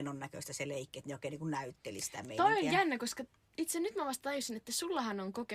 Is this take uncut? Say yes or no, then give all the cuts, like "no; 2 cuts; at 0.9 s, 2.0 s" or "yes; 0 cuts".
yes; 0 cuts